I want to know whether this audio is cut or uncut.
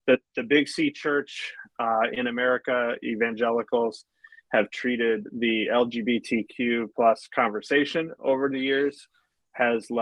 uncut